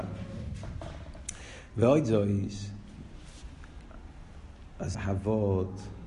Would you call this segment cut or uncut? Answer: cut